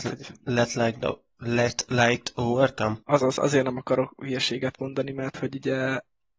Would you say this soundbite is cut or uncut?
cut